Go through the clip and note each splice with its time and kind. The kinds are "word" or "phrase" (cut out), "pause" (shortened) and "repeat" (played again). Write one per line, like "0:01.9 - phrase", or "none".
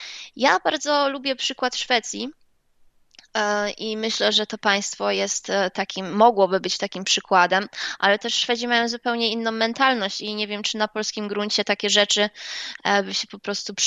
0:04.3 - word